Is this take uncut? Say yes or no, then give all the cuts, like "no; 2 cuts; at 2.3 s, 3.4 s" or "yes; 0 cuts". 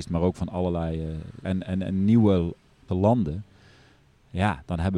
no; 2 cuts; at 1.4 s, 2.9 s